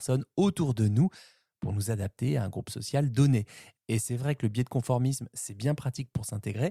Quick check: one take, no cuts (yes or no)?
yes